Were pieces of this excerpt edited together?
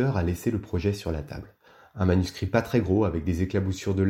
no; 0 cuts

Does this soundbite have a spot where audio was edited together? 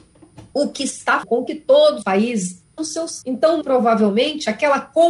yes; 5 cuts; at 1.2 s, 2.0 s, 2.8 s, 3.2 s, 3.6 s

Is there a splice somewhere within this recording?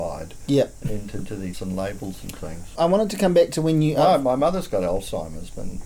yes; 2 cuts; at 1.5 s, 2.8 s

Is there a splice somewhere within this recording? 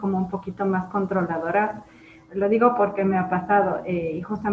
no; 0 cuts

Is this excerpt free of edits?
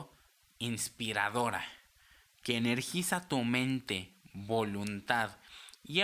yes; 0 cuts

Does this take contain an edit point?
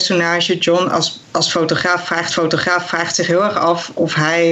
yes; 2 cuts; at 1.2 s, 2.3 s

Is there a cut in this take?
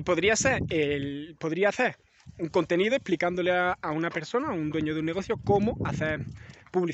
no; 0 cuts

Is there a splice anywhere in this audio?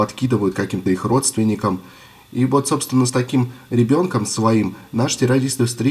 no; 0 cuts

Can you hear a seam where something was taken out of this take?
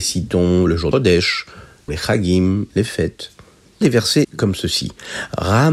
yes; 4 cuts; at 0.9 s, 1.9 s, 3.8 s, 4.2 s

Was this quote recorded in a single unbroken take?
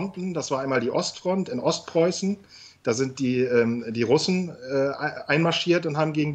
yes; 0 cuts

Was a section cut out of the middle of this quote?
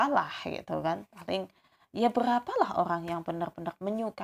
no; 0 cuts

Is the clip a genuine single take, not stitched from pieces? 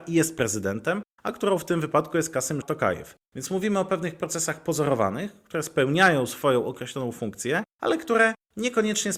no; 1 cut; at 2.6 s

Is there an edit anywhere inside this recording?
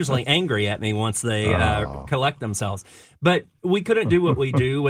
no; 0 cuts

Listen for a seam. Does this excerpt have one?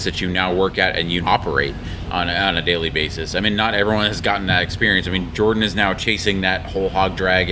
yes; 1 cut; at 1.2 s

